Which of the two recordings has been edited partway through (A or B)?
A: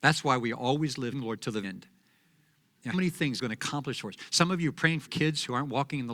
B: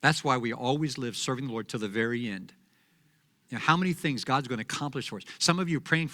A